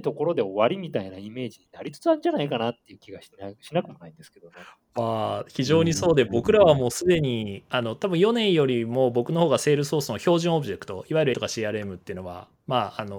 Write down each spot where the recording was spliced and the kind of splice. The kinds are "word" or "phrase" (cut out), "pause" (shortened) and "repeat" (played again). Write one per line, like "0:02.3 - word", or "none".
0:11.3 - word